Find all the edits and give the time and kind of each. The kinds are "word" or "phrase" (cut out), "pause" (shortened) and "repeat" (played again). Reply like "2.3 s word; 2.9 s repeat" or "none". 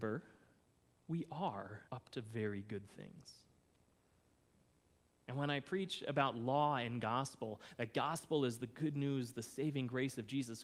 1.9 s pause